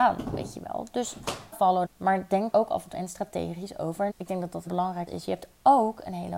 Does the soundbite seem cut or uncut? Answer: cut